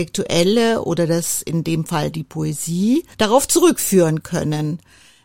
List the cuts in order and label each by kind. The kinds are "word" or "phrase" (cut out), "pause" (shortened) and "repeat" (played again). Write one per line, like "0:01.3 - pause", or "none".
0:03.1 - pause